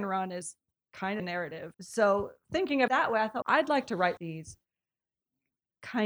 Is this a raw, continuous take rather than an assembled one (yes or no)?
no